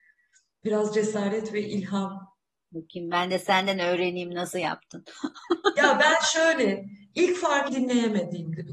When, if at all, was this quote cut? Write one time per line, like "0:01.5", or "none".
0:07.7